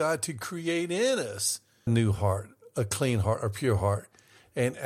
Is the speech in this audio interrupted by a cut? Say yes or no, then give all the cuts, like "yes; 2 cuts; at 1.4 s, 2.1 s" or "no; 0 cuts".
yes; 1 cut; at 1.9 s